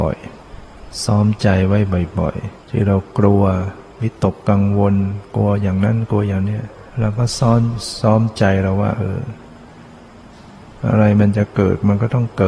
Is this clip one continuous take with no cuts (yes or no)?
no